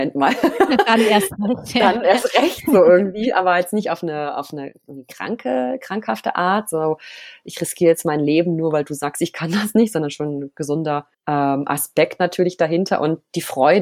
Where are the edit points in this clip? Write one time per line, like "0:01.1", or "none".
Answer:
0:11.1